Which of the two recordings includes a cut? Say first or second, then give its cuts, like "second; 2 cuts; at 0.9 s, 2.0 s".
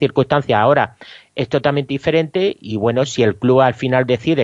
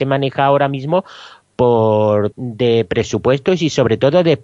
second; 1 cut; at 2.3 s